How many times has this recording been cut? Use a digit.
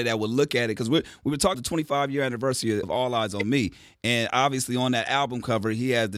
2